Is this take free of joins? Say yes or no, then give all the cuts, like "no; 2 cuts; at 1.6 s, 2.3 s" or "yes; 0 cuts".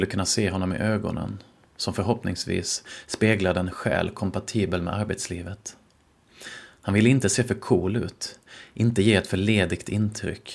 yes; 0 cuts